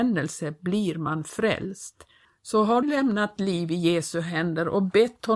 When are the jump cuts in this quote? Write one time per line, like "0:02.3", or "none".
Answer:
0:02.2
0:02.8
0:03.4